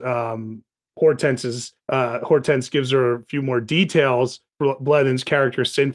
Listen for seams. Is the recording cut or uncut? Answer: cut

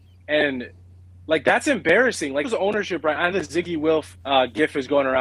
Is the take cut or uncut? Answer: cut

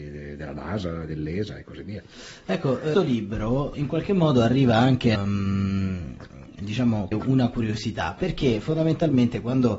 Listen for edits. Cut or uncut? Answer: cut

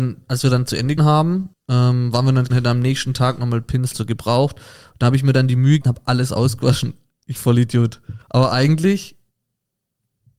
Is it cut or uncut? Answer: cut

